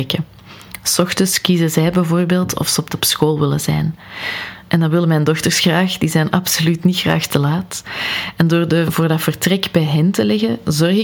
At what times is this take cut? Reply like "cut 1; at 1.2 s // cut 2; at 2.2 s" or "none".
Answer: cut 1; at 2.9 s // cut 2; at 8.9 s